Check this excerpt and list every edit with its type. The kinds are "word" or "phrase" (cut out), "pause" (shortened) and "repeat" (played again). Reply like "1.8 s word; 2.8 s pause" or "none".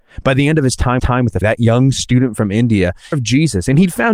1.0 s repeat; 1.4 s word; 3.1 s phrase